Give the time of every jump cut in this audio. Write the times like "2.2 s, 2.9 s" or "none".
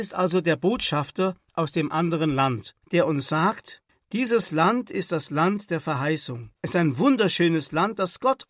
2.8 s, 3.9 s, 6.6 s